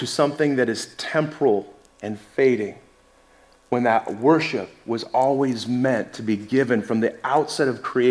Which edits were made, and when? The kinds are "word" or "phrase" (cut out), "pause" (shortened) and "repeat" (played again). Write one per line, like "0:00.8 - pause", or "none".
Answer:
none